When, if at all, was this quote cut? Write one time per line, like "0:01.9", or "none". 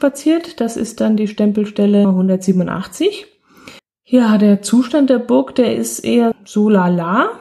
0:02.0
0:03.8
0:06.3